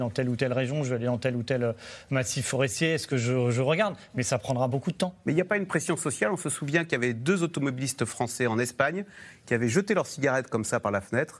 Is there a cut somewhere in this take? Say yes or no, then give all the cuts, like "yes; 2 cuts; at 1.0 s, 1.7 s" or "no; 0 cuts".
no; 0 cuts